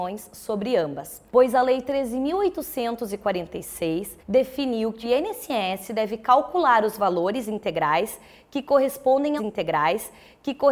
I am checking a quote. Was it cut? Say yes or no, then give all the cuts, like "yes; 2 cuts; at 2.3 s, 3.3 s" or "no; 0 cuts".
yes; 4 cuts; at 1.3 s, 4.2 s, 5.0 s, 9.4 s